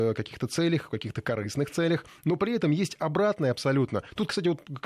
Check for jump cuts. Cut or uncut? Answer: uncut